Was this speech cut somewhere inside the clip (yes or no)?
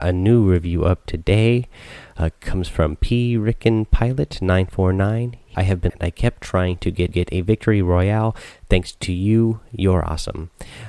yes